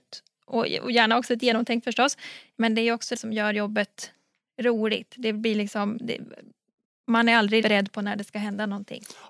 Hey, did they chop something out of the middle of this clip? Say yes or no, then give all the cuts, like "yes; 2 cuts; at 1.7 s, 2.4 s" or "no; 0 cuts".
yes; 3 cuts; at 1.8 s, 3.2 s, 7.6 s